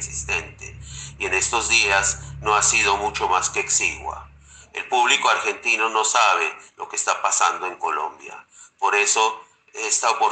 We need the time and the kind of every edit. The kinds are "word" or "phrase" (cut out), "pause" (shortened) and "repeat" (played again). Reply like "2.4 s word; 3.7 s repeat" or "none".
none